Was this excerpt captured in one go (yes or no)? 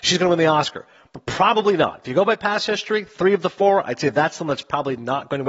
yes